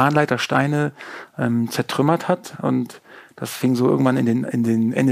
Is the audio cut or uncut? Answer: uncut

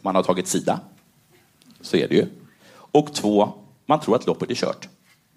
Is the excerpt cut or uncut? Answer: uncut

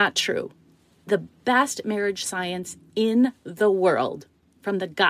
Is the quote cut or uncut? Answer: uncut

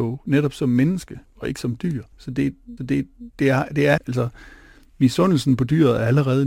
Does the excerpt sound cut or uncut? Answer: cut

